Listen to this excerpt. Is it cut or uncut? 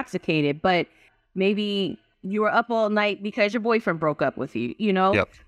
uncut